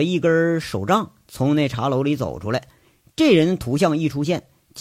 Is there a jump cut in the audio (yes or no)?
no